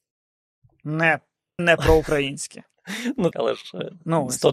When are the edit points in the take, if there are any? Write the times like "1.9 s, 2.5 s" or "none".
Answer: 1.6 s, 3.3 s